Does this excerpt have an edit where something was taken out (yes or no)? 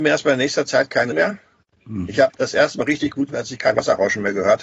yes